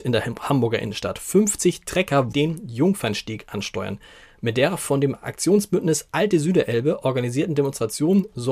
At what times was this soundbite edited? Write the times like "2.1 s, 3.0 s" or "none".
2.3 s